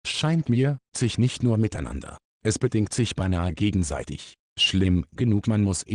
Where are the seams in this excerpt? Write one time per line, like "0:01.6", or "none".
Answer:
0:00.9